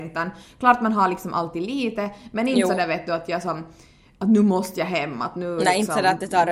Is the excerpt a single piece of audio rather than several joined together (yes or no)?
yes